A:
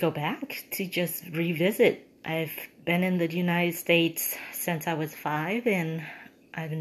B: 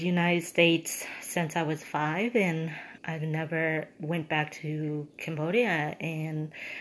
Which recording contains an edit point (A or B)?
B